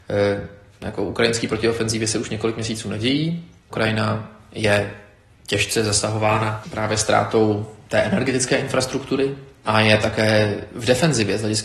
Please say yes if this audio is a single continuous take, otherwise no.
yes